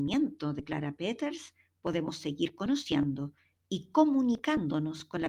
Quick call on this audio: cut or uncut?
uncut